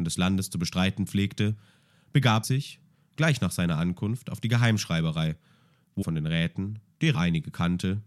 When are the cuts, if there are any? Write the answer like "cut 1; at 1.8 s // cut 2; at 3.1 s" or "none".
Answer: cut 1; at 2.4 s // cut 2; at 6.0 s // cut 3; at 7.1 s